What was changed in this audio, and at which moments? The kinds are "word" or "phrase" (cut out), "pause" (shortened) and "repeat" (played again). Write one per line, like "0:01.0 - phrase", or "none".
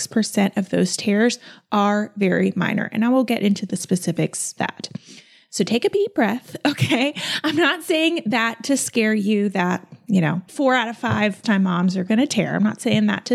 0:04.6 - phrase
0:10.5 - word
0:11.4 - word